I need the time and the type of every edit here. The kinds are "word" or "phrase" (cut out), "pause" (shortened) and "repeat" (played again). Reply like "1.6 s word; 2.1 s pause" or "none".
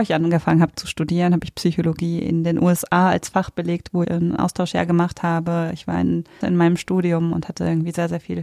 4.0 s word; 6.4 s word

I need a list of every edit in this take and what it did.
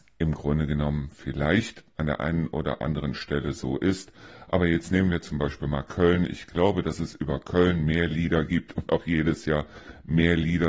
none

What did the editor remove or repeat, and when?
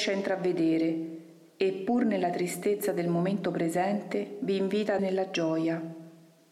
5.0 s word

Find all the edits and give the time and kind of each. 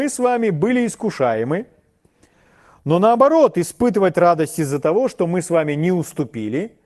none

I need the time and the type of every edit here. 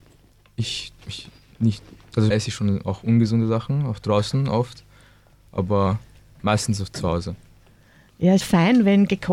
1.0 s word; 2.3 s word; 8.4 s word

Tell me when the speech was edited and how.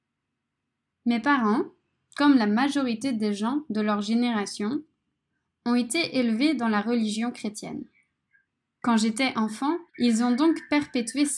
9.9 s pause

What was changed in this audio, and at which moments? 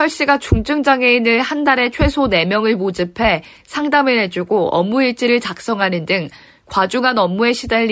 none

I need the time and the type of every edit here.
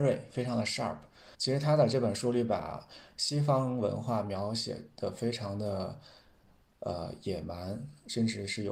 1.3 s pause

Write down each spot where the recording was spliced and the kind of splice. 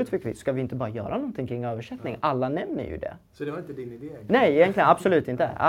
none

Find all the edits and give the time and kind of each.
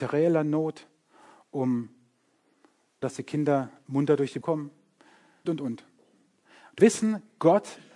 3.0 s word; 4.4 s word; 5.5 s word; 6.8 s word

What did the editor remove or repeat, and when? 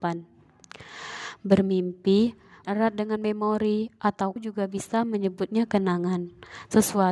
2.6 s word; 4.4 s word

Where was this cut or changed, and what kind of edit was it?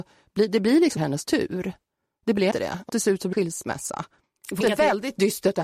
1.0 s word; 2.5 s word; 2.9 s word; 3.3 s word; 4.6 s word

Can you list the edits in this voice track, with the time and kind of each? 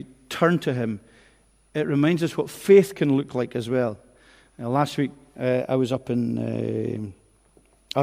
none

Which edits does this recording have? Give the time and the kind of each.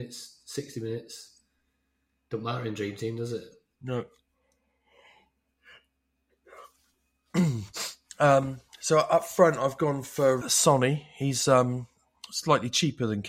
10.4 s word

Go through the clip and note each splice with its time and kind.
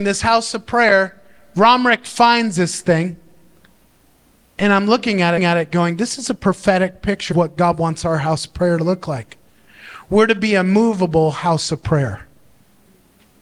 5.4 s repeat; 7.3 s word

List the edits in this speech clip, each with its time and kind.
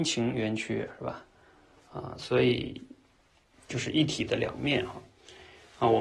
none

